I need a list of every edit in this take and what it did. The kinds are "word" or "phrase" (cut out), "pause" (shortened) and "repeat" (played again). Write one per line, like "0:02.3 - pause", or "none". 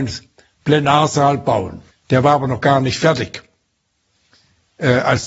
0:01.9 - pause